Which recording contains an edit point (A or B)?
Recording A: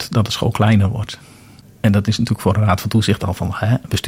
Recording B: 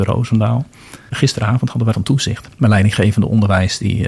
B